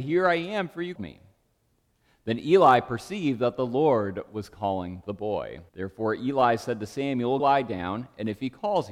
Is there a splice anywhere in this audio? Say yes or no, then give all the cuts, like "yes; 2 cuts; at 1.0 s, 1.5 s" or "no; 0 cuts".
yes; 3 cuts; at 1.0 s, 5.7 s, 7.4 s